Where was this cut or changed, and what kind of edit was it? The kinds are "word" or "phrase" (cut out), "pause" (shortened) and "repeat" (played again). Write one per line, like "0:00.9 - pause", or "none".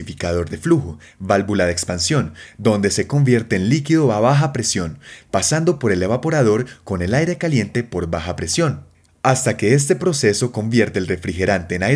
none